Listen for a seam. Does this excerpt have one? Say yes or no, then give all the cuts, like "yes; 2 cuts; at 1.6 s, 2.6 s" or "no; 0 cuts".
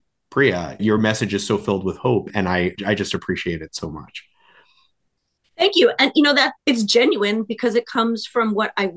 no; 0 cuts